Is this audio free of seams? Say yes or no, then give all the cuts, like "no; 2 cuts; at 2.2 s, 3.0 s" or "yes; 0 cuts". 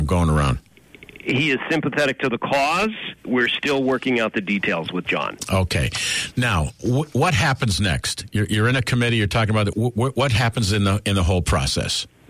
no; 2 cuts; at 3.2 s, 9.7 s